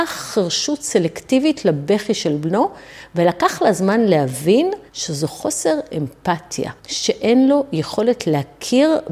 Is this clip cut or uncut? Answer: cut